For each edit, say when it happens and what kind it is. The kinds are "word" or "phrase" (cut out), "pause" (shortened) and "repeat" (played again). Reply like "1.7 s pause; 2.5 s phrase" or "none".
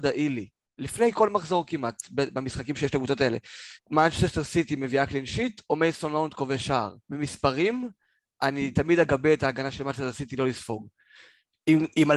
3.8 s pause; 7.0 s pause